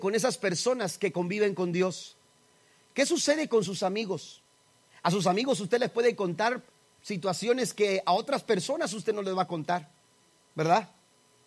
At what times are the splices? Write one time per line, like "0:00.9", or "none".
none